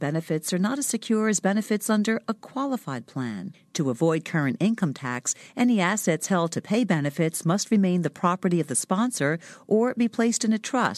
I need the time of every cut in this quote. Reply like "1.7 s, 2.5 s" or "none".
none